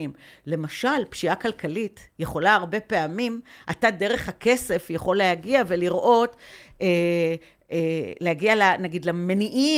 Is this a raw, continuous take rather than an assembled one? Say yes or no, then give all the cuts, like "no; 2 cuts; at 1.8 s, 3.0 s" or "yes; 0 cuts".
yes; 0 cuts